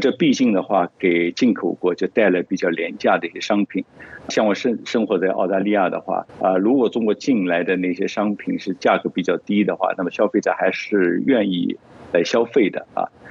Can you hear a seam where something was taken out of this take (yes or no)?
yes